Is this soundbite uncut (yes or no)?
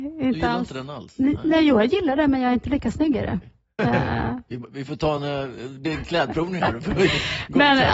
yes